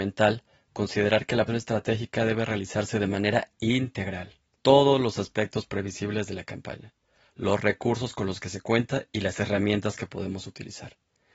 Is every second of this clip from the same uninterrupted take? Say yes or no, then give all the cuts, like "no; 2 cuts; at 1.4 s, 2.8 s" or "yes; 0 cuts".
no; 2 cuts; at 1.5 s, 4.6 s